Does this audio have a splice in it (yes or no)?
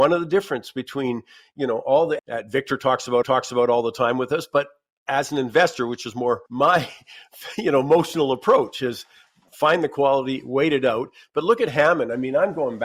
yes